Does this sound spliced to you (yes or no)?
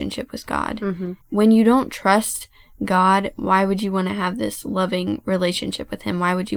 yes